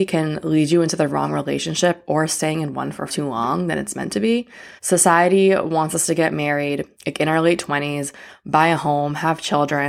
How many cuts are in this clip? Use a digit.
3